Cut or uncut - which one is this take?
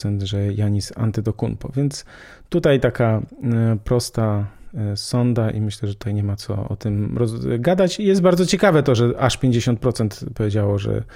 uncut